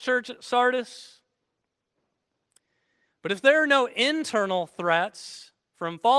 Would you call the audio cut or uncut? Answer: uncut